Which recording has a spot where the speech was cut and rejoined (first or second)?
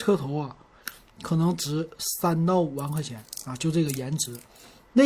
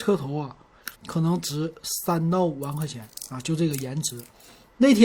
second